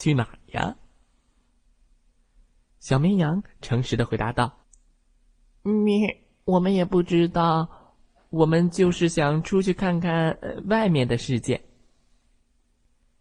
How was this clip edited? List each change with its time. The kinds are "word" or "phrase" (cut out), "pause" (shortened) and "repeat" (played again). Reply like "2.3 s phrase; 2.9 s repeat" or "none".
4.6 s pause